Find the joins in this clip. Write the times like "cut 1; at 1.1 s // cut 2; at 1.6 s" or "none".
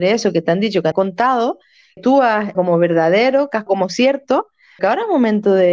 cut 1; at 0.9 s // cut 2; at 2.0 s // cut 3; at 2.5 s // cut 4; at 3.7 s // cut 5; at 4.8 s